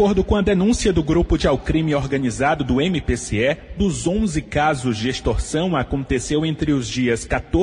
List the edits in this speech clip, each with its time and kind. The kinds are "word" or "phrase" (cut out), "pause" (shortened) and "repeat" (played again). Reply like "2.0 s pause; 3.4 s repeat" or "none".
1.4 s word; 3.8 s word